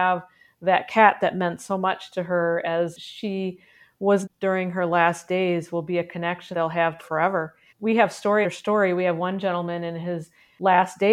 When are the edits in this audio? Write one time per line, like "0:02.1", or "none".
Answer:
0:04.2
0:06.5
0:07.0
0:07.7
0:08.4